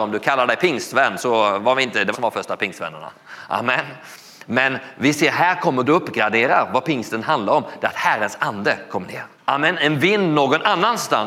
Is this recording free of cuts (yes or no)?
no